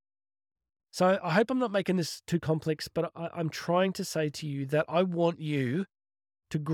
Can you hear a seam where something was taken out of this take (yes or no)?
no